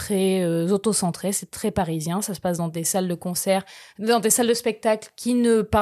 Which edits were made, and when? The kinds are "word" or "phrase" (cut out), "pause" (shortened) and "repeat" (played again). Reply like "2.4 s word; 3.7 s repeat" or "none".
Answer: none